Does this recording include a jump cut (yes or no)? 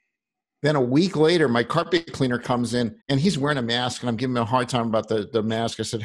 yes